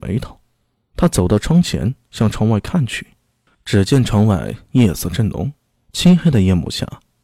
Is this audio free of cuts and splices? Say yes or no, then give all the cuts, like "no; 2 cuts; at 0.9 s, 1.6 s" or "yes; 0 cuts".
yes; 0 cuts